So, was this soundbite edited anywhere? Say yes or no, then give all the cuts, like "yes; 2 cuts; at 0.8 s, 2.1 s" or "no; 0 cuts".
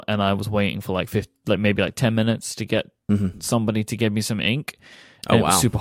no; 0 cuts